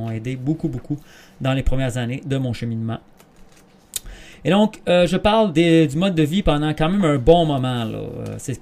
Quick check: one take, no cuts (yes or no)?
yes